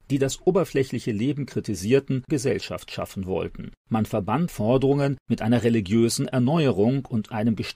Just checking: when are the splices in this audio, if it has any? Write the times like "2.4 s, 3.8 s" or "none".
2.3 s, 3.8 s, 4.5 s